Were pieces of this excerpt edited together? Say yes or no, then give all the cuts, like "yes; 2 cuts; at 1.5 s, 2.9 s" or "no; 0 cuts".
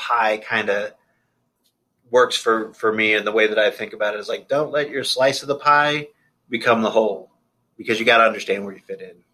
no; 0 cuts